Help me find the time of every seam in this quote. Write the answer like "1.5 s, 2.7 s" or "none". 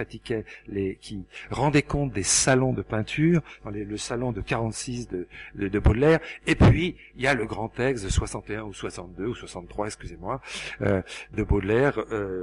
11.3 s